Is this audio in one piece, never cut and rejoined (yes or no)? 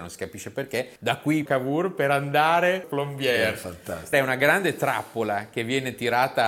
no